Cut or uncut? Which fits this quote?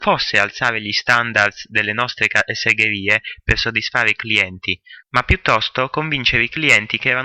cut